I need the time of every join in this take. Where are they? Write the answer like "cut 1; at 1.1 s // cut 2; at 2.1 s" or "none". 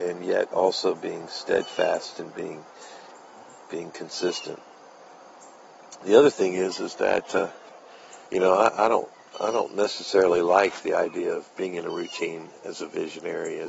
cut 1; at 8.2 s